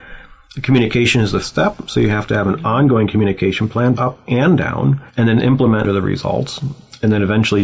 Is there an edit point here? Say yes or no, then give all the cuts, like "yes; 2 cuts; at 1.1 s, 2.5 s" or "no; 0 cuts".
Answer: yes; 4 cuts; at 1.4 s, 3.9 s, 5.1 s, 5.8 s